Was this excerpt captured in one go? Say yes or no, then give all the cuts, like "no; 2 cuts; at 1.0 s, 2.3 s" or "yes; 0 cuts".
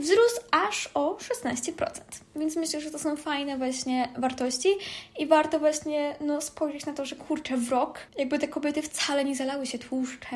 no; 1 cut; at 8.1 s